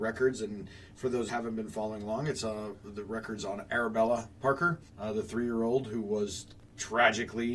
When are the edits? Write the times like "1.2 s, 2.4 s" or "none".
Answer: 1.3 s, 4.9 s